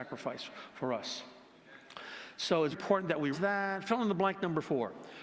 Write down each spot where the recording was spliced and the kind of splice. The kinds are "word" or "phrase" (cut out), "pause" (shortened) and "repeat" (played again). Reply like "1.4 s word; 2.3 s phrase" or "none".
2.7 s word; 3.3 s word